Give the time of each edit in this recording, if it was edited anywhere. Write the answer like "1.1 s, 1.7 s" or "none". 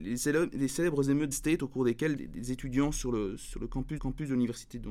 1.3 s, 2.2 s, 4.0 s